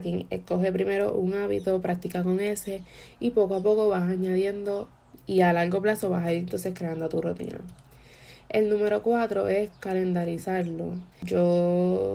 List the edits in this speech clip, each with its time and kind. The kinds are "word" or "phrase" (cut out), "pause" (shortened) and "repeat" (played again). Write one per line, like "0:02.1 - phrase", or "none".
0:11.1 - pause